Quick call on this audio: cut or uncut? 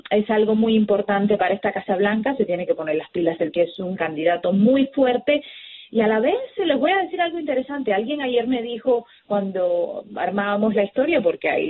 cut